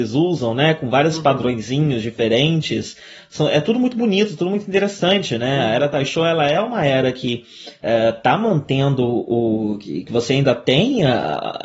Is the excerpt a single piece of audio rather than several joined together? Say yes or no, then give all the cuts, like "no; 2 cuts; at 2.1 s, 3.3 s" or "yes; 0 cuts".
yes; 0 cuts